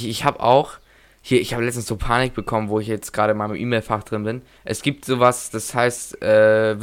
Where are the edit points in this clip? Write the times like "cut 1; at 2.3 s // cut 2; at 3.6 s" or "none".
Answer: cut 1; at 4.6 s